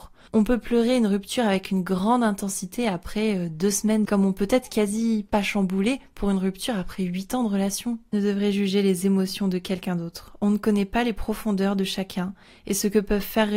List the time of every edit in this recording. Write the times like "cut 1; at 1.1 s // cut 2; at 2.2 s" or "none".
cut 1; at 4.0 s // cut 2; at 8.1 s